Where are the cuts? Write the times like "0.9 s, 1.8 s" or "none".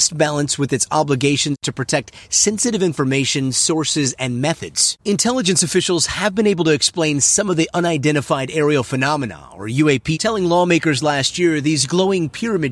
5.0 s, 10.1 s